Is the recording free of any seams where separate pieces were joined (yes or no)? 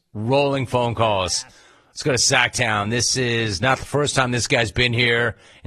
yes